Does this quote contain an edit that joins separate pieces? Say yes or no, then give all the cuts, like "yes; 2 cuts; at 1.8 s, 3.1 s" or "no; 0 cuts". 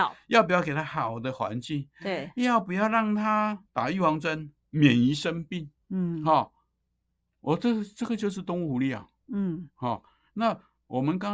yes; 2 cuts; at 3.7 s, 5.8 s